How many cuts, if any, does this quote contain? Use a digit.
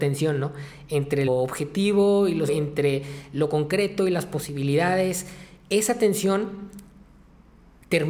2